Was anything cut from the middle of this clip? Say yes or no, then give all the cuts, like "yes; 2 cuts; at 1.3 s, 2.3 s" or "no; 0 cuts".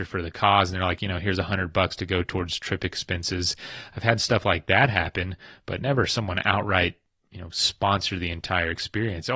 no; 0 cuts